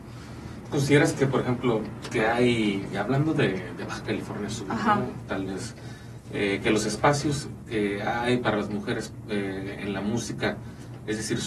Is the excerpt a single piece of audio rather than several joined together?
yes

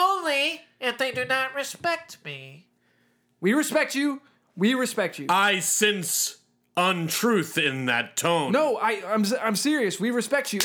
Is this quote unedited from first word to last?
yes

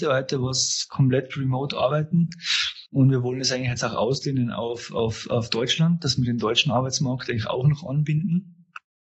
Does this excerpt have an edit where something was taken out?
yes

